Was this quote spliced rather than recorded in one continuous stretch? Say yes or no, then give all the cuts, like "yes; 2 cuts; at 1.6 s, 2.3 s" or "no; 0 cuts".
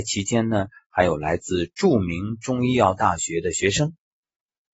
no; 0 cuts